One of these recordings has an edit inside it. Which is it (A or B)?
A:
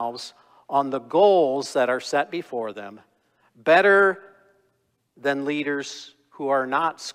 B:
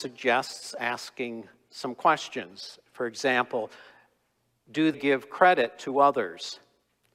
B